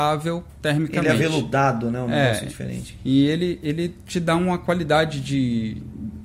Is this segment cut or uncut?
uncut